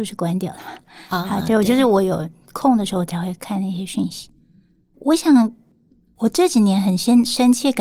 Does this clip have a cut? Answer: no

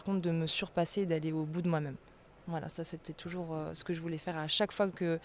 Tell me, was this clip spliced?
no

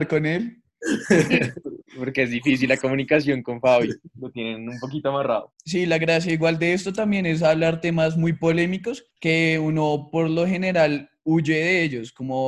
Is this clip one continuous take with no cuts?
no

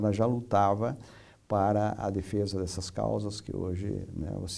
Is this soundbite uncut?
yes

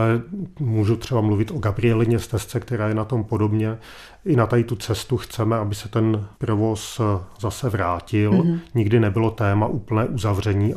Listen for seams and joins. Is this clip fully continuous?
no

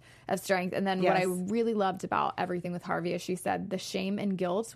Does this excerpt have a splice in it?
no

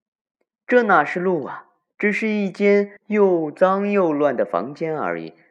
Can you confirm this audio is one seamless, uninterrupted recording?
no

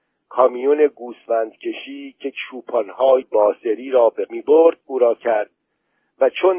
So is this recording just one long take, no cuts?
no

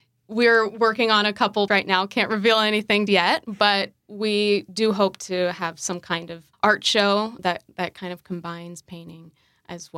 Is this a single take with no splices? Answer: no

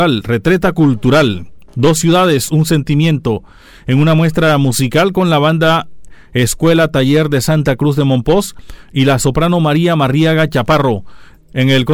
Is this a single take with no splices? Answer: yes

